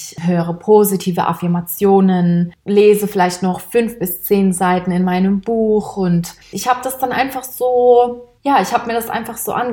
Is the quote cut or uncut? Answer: cut